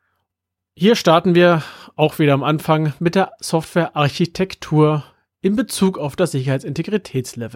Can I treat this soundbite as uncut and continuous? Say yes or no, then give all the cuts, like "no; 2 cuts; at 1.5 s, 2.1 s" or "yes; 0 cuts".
yes; 0 cuts